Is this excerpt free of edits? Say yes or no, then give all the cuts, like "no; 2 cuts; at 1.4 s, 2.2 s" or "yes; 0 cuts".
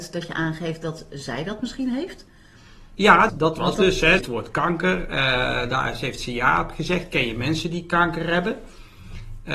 no; 2 cuts; at 3.3 s, 4.2 s